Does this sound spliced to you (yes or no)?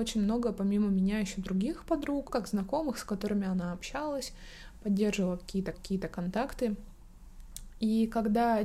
yes